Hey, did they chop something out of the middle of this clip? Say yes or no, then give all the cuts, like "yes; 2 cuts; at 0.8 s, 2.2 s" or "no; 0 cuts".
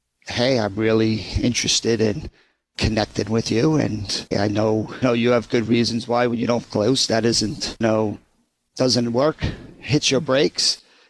yes; 4 cuts; at 4.3 s, 5.0 s, 6.6 s, 7.8 s